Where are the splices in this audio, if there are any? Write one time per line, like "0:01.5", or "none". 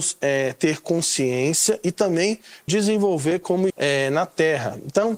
0:02.7
0:03.7